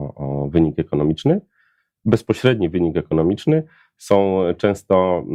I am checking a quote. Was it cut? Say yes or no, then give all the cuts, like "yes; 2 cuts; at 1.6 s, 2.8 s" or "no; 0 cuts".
no; 0 cuts